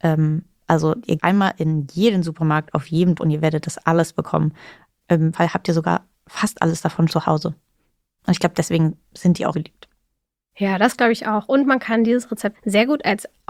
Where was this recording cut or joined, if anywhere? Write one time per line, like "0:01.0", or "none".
0:01.2
0:03.2
0:05.3
0:07.1
0:09.5
0:12.5